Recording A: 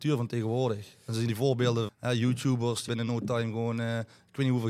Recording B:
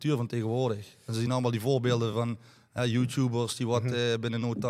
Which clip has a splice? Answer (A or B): A